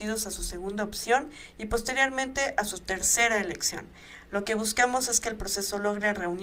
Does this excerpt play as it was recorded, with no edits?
yes; 0 cuts

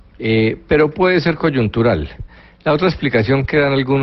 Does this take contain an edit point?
no; 0 cuts

